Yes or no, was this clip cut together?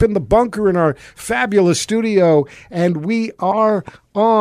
no